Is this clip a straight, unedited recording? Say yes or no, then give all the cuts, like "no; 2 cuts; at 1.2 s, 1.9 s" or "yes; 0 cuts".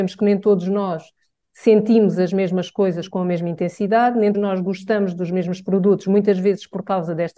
no; 1 cut; at 4.3 s